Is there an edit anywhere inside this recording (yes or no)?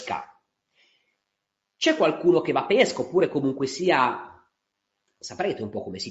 yes